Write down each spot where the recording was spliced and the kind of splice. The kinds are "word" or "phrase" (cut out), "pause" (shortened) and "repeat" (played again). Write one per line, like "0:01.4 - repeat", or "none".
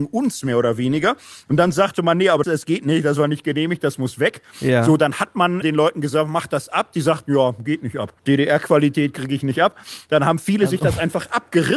0:02.4 - word
0:05.6 - word
0:08.2 - pause